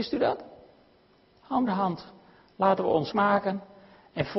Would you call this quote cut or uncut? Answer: cut